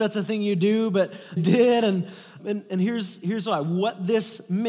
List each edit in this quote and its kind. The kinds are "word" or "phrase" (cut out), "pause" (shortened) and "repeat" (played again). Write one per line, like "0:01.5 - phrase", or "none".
0:01.4 - word
0:02.4 - word

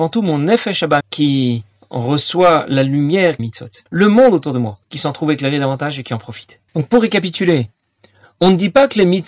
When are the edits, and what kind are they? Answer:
0:01.0 - word
0:03.4 - phrase
0:03.9 - pause
0:04.8 - pause
0:06.7 - pause

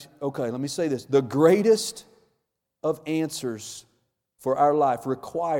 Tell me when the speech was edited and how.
none

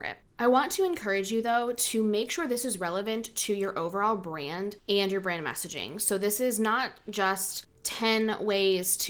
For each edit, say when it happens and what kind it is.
none

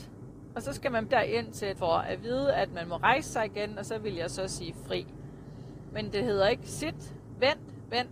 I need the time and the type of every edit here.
0:01.1 - word
0:01.8 - word

